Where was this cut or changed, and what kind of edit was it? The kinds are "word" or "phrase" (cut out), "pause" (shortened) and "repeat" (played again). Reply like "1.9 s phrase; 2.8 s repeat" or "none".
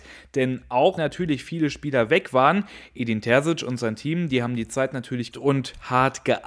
1.0 s word; 5.3 s word